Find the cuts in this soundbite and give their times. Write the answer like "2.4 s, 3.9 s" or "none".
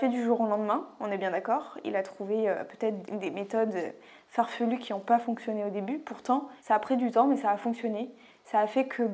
3.0 s, 5.2 s, 6.6 s